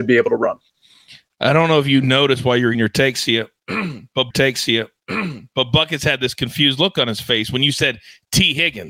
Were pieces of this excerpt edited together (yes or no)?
yes